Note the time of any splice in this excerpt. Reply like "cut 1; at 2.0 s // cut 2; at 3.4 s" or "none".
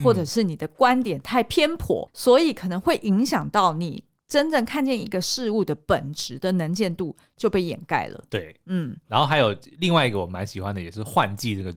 cut 1; at 2.1 s